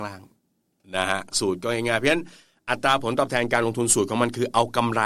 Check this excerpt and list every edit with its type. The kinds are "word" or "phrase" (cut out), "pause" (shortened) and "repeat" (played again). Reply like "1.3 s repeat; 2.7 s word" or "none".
none